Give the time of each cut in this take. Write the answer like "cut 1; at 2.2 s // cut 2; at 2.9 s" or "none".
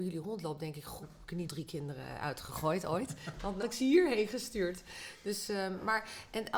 cut 1; at 1.0 s // cut 2; at 1.5 s // cut 3; at 3.6 s

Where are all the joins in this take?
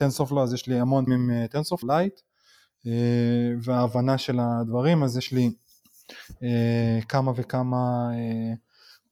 cut 1; at 1.1 s // cut 2; at 1.8 s

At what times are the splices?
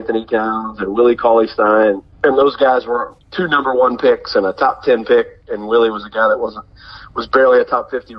cut 1; at 2.1 s // cut 2; at 3.2 s

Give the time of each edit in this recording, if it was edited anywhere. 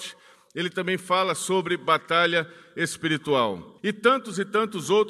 cut 1; at 3.8 s

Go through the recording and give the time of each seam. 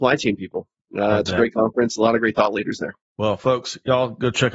cut 1; at 3.0 s

